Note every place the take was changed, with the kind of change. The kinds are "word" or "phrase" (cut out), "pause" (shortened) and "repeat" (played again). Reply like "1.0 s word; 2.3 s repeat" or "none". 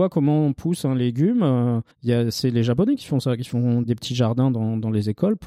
1.9 s pause; 3.8 s word